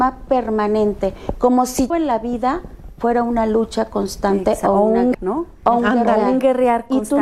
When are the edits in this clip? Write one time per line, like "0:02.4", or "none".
0:01.9
0:05.1